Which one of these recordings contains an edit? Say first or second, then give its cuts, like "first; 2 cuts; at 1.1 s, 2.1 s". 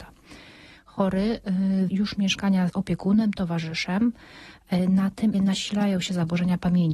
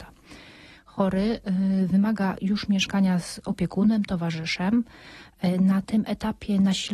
first; 3 cuts; at 1.9 s, 2.7 s, 5.3 s